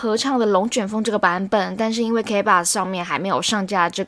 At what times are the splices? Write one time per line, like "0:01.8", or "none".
none